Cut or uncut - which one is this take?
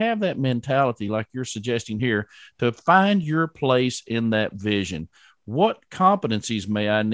uncut